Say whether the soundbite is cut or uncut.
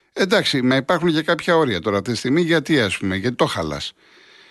uncut